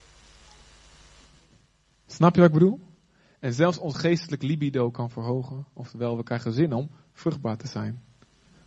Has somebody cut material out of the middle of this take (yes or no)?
no